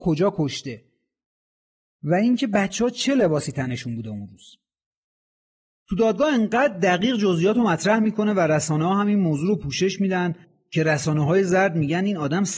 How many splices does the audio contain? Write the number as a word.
zero